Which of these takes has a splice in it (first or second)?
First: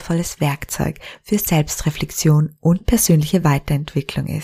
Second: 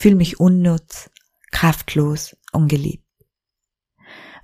second